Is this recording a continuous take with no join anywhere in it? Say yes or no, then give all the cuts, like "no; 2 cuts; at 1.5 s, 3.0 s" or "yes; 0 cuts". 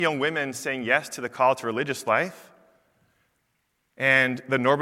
yes; 0 cuts